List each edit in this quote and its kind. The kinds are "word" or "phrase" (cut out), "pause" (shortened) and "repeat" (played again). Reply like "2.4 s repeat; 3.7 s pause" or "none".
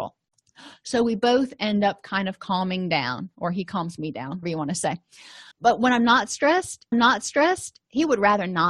4.4 s word; 5.5 s pause; 6.9 s repeat